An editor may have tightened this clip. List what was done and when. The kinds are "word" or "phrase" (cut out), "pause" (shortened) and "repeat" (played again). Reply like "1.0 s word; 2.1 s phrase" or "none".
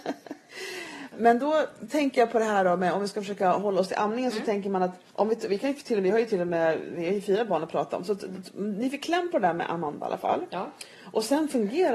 1.1 s word; 5.1 s pause